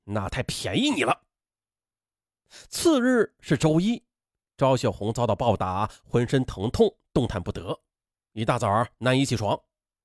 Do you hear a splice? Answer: no; 0 cuts

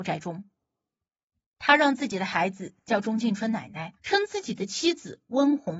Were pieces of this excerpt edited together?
yes; 1 cut; at 4.0 s

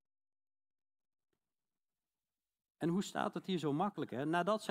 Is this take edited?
no; 0 cuts

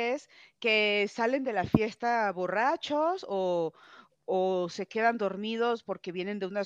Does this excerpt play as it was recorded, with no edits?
yes; 0 cuts

